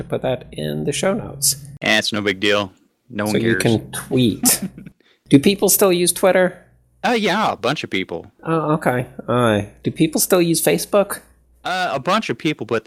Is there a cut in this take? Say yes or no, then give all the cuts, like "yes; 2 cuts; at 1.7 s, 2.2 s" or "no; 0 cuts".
no; 0 cuts